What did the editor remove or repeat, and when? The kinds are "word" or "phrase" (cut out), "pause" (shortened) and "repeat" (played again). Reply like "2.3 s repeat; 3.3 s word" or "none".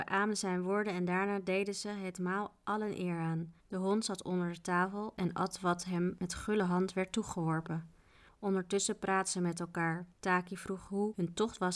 3.6 s pause; 10.1 s pause